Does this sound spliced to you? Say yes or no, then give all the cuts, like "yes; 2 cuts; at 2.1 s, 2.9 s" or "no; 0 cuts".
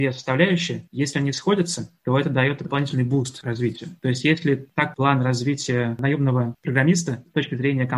yes; 2 cuts; at 4.0 s, 4.9 s